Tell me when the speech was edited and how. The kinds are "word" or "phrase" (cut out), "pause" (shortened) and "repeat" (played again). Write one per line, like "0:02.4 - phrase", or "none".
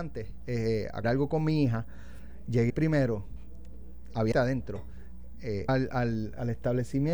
0:01.0 - word
0:02.7 - word
0:04.3 - word
0:05.7 - word